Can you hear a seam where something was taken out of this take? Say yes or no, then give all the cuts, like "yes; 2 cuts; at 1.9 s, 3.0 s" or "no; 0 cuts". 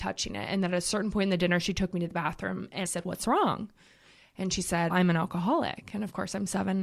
yes; 2 cuts; at 2.8 s, 4.9 s